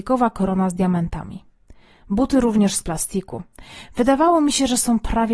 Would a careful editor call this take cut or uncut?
uncut